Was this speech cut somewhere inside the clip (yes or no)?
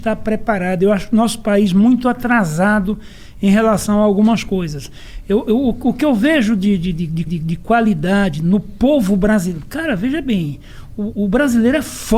yes